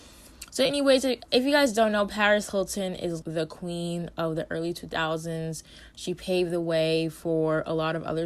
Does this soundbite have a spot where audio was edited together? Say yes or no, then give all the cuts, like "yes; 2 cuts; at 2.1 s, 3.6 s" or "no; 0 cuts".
yes; 1 cut; at 3.2 s